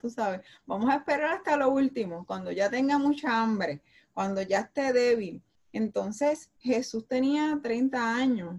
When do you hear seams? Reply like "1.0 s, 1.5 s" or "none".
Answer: 6.6 s